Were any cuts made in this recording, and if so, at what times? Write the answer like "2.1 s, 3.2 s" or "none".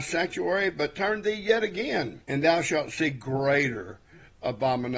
2.2 s